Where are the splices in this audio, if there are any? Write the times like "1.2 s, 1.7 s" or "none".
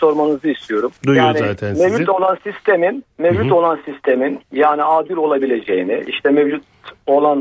1.0 s